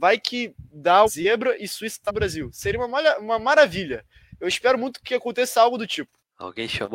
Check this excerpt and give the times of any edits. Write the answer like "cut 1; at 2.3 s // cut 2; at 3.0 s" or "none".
cut 1; at 1.1 s // cut 2; at 2.1 s